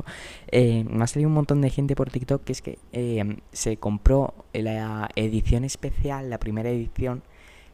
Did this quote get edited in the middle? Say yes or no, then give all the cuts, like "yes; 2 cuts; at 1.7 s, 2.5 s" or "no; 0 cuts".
no; 0 cuts